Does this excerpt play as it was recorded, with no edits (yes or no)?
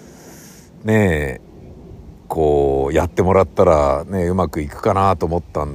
yes